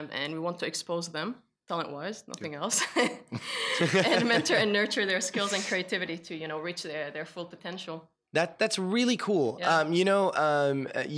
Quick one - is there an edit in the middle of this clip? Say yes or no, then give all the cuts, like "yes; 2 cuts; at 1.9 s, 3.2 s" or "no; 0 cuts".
no; 0 cuts